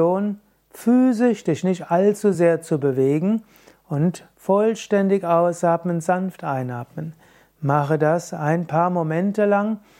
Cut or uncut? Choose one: uncut